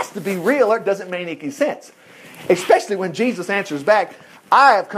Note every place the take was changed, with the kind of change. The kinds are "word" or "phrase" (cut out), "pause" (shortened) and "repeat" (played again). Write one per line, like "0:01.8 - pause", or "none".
none